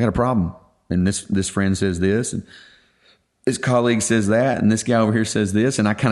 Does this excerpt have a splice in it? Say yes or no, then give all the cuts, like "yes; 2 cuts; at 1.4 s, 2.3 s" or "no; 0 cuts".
no; 0 cuts